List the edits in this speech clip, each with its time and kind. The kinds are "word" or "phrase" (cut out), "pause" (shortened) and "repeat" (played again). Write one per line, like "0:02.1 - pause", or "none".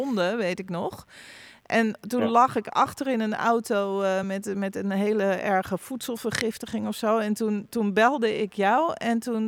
none